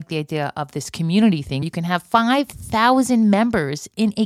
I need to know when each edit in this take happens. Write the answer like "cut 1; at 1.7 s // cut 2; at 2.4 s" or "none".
cut 1; at 1.6 s

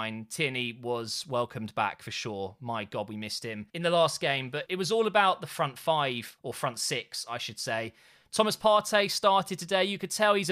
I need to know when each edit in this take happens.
cut 1; at 3.7 s // cut 2; at 4.7 s // cut 3; at 6.4 s

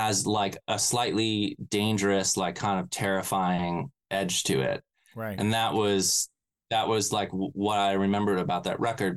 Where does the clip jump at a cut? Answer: none

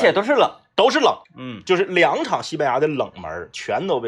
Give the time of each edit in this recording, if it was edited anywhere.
cut 1; at 1.2 s

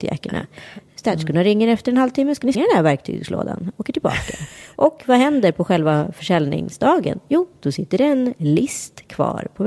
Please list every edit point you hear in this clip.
cut 1; at 2.5 s

